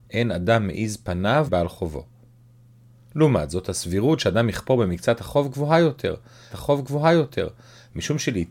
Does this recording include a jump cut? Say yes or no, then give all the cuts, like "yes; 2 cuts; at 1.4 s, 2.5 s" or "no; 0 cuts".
yes; 2 cuts; at 1.5 s, 6.5 s